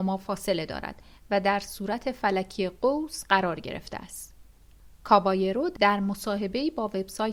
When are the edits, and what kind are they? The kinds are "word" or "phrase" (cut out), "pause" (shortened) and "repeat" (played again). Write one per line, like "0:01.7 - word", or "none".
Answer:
none